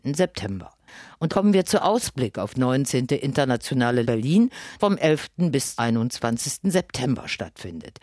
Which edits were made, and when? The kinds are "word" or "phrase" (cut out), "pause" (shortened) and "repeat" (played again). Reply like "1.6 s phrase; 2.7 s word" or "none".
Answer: 1.3 s word; 1.8 s word; 2.5 s word; 4.0 s word; 4.8 s word; 5.8 s word